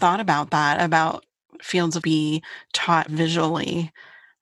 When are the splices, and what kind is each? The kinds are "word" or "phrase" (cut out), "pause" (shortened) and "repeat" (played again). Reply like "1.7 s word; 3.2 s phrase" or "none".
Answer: 1.6 s word; 2.0 s phrase; 3.1 s word